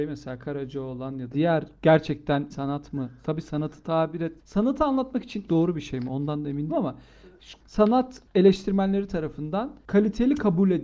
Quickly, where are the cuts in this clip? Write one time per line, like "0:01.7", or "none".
0:01.3
0:01.8
0:02.5
0:04.4
0:05.5
0:06.7
0:07.6